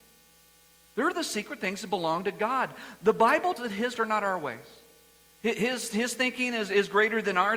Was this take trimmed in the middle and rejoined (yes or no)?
yes